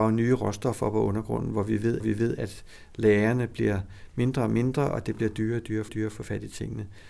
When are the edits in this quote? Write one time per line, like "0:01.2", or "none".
0:02.0
0:05.9